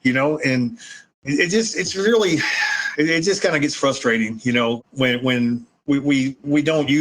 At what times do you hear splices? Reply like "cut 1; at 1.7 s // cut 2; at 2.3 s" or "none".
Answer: none